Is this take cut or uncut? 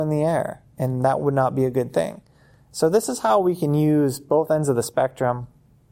uncut